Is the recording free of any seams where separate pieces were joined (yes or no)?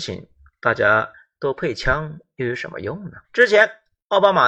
no